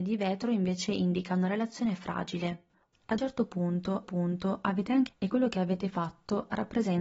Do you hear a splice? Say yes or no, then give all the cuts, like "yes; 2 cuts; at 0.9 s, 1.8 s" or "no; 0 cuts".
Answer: yes; 3 cuts; at 3.2 s, 4.0 s, 5.1 s